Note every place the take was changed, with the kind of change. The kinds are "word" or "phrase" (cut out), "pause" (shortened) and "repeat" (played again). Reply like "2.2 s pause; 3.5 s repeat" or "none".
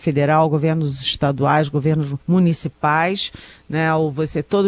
2.2 s pause